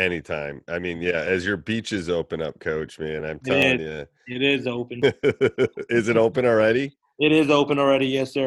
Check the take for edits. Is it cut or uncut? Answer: uncut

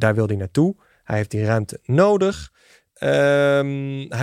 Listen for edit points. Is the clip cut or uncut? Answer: uncut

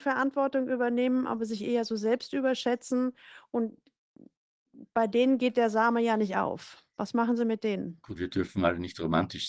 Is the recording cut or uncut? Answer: cut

